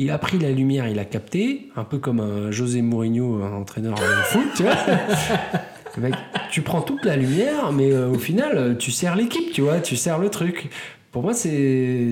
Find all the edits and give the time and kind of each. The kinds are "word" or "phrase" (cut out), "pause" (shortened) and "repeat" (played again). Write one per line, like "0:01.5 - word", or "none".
none